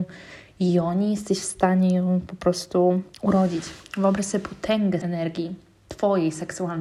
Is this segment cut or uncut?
cut